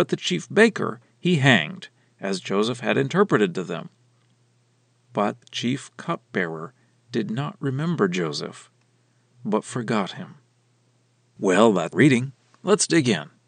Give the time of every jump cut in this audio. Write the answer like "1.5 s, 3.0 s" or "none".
5.4 s, 11.9 s

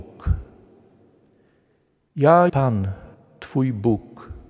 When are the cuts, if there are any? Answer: 2.5 s, 3.1 s

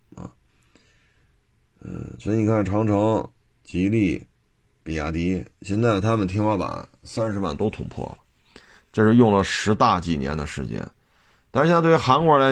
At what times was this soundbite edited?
none

